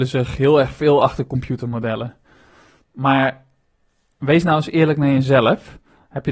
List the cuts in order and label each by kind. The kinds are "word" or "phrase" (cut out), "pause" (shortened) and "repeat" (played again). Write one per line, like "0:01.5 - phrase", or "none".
none